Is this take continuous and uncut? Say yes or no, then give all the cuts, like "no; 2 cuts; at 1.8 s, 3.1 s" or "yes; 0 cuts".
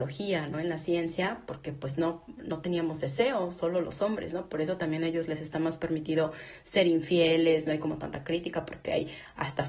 yes; 0 cuts